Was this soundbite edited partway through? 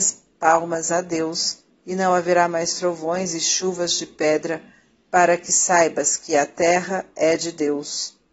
no; 0 cuts

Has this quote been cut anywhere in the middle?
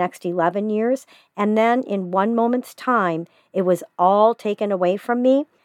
no; 0 cuts

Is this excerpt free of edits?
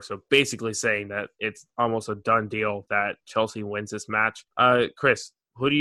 no; 1 cut; at 4.5 s

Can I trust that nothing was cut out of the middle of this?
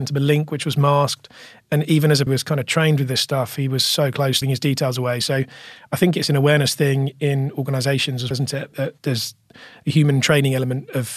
no; 4 cuts; at 2.3 s, 4.4 s, 8.3 s, 9.0 s

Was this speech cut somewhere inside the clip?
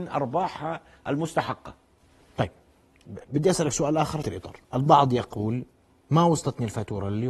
yes; 3 cuts; at 2.0 s, 4.2 s, 4.6 s

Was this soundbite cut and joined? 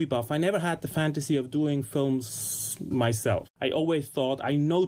no; 0 cuts

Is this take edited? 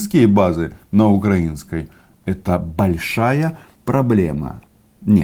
no; 0 cuts

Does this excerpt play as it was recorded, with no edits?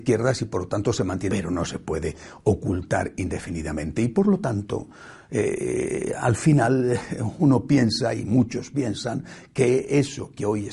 no; 1 cut; at 1.3 s

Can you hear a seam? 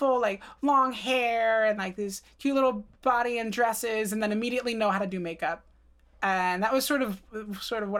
no; 0 cuts

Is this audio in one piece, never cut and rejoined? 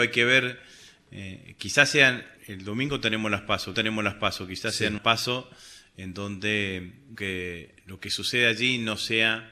no; 4 cuts; at 2.4 s, 3.7 s, 5.0 s, 7.1 s

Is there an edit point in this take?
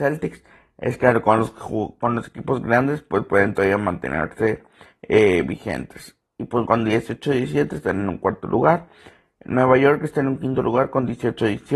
yes; 1 cut; at 6.7 s

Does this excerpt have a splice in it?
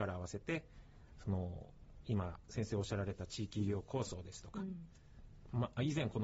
no; 0 cuts

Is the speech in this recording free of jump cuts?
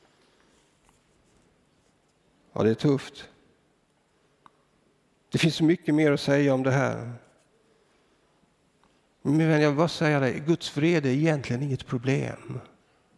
yes; 0 cuts

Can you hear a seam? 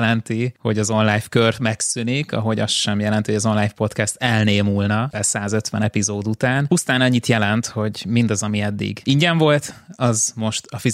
yes; 1 cut; at 5.1 s

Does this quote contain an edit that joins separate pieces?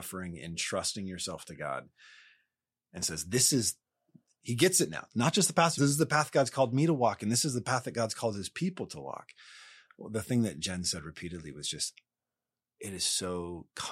yes; 1 cut; at 5.8 s

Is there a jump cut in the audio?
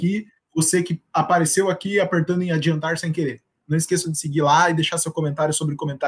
no; 0 cuts

